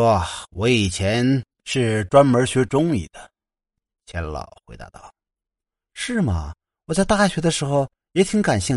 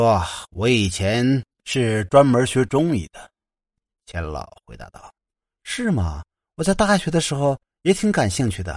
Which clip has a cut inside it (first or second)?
second